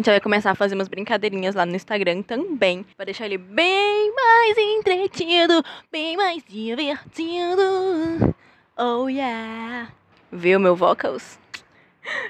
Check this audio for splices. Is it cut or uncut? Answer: cut